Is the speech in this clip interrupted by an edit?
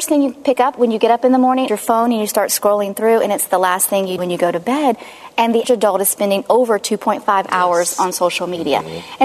yes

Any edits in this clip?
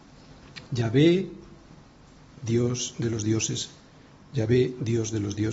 no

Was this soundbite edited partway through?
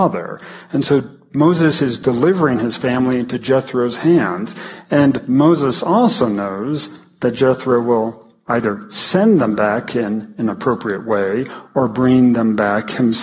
no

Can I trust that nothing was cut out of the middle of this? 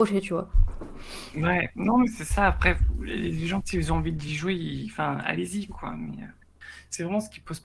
yes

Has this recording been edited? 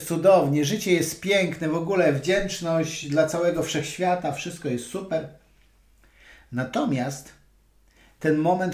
no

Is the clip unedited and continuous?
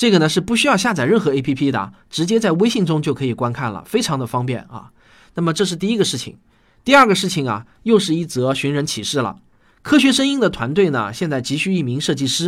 yes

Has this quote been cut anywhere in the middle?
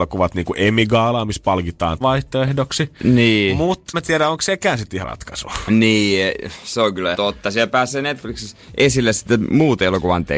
yes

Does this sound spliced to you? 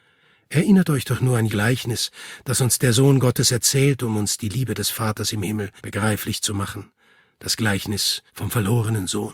yes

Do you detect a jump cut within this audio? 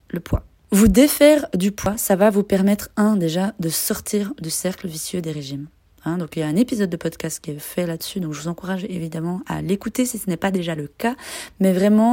no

